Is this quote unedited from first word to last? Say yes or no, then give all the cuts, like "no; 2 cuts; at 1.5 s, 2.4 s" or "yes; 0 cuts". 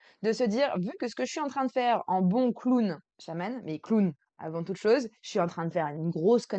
no; 2 cuts; at 3.1 s, 5.2 s